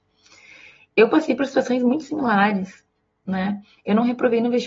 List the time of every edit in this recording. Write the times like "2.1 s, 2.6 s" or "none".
none